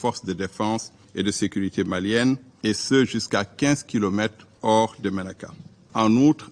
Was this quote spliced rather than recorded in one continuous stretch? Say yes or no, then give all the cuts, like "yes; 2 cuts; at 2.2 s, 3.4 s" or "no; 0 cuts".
yes; 1 cut; at 5.0 s